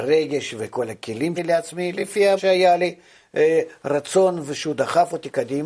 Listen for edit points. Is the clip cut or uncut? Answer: cut